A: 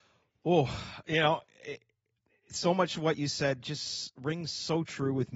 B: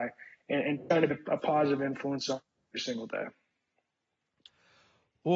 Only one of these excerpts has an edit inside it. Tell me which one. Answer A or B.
B